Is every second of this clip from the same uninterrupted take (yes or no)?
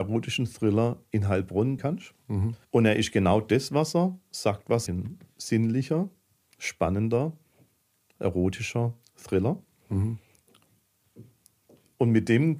no